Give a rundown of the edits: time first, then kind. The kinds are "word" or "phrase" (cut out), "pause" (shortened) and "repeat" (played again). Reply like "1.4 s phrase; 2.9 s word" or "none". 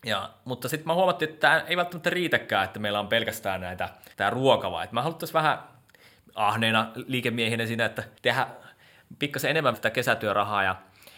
4.1 s pause; 8.2 s pause; 9.7 s word